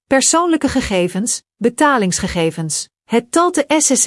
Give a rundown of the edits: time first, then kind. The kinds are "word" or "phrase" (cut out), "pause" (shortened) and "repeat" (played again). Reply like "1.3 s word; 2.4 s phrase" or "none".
3.0 s pause